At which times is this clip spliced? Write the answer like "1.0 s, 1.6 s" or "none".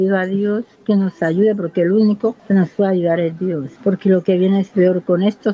2.4 s, 3.8 s